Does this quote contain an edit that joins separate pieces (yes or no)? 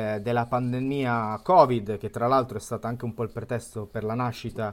no